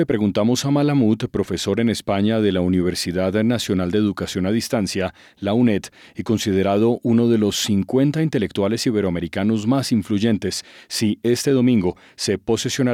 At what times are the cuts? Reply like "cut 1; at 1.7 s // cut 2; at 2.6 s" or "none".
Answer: none